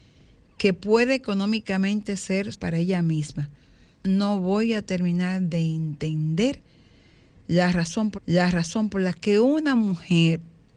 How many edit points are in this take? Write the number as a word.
three